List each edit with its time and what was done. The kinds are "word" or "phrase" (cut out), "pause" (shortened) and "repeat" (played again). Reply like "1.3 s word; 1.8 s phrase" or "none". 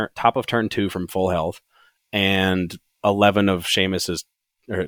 2.9 s word